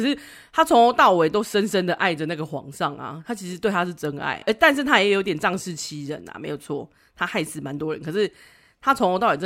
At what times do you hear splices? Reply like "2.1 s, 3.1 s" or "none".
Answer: 4.4 s